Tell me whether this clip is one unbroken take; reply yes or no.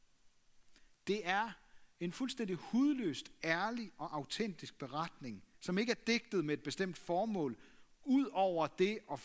no